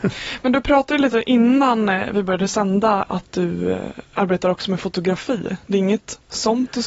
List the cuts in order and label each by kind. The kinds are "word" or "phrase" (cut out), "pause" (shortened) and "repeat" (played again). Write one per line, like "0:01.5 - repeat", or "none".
0:03.1 - word